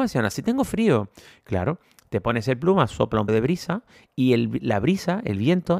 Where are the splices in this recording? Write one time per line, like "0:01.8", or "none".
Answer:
0:03.3